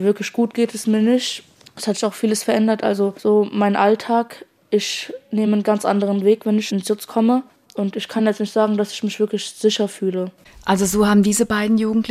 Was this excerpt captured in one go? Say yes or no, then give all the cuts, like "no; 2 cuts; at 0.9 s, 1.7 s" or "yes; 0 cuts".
yes; 0 cuts